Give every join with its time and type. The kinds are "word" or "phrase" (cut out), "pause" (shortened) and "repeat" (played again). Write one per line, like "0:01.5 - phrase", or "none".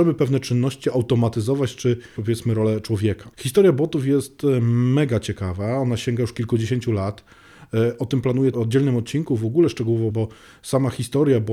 0:02.2 - word
0:03.3 - pause
0:08.5 - phrase
0:10.1 - word